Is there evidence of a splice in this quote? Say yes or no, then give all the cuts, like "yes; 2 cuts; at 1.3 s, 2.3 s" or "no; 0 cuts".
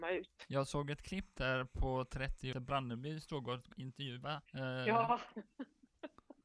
yes; 1 cut; at 2.5 s